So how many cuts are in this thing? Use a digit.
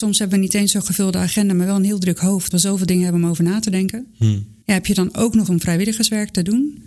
3